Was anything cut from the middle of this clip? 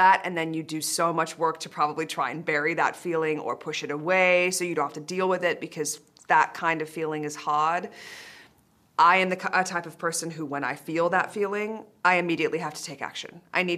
no; 0 cuts

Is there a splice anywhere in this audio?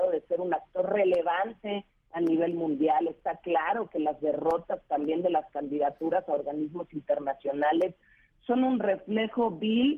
no; 0 cuts

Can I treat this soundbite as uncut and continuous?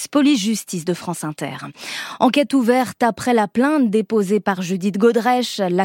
yes; 0 cuts

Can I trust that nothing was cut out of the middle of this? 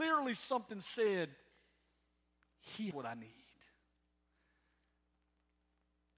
no; 1 cut; at 2.9 s

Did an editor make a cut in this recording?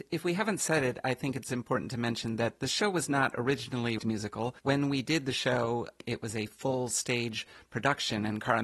yes; 2 cuts; at 4.0 s, 4.6 s

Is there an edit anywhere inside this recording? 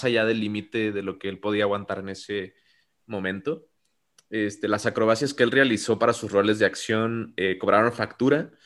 no; 0 cuts

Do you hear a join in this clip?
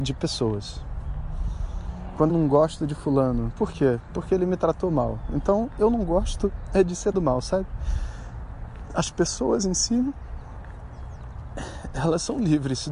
yes; 2 cuts; at 2.3 s, 7.1 s

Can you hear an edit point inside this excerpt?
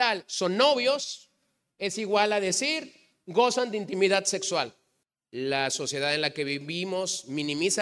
no; 0 cuts

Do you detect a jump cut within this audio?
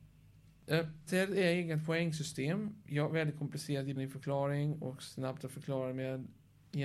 yes; 2 cuts; at 1.1 s, 4.0 s

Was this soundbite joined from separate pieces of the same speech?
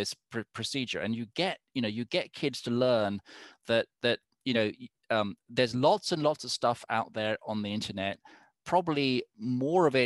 no; 0 cuts

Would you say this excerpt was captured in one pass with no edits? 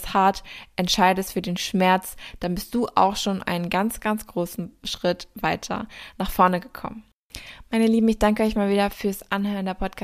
yes; 0 cuts

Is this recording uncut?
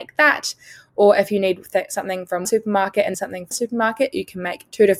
no; 3 cuts; at 2.4 s, 3.1 s, 3.5 s

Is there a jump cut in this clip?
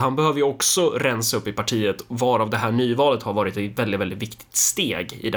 no; 0 cuts

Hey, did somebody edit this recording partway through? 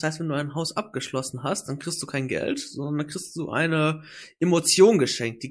no; 0 cuts

